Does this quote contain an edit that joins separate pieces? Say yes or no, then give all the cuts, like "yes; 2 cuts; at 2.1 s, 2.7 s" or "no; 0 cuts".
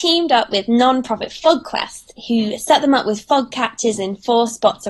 no; 0 cuts